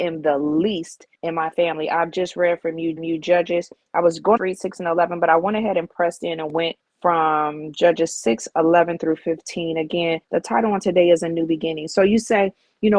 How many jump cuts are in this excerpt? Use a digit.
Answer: 5